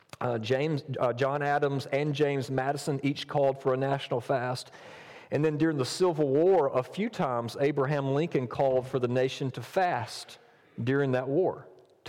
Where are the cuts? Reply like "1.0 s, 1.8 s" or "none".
none